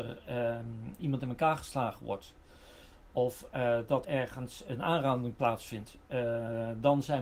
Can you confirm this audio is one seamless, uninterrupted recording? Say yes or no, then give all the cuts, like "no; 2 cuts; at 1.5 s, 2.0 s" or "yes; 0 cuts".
no; 2 cuts; at 1.0 s, 4.0 s